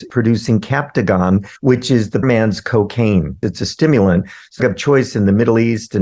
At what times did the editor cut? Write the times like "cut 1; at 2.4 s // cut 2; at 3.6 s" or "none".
cut 1; at 1.6 s // cut 2; at 2.2 s // cut 3; at 4.6 s